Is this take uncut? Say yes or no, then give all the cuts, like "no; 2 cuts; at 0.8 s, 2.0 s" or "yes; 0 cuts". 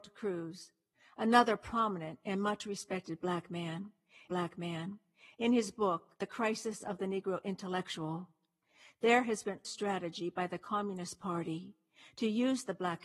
no; 3 cuts; at 4.3 s, 6.1 s, 9.6 s